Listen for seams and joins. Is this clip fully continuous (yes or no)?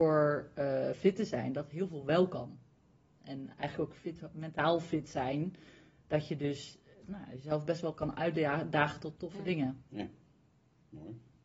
yes